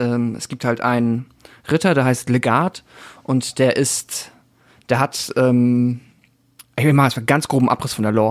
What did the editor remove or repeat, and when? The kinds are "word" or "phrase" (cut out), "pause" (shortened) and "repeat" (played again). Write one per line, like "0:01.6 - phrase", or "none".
none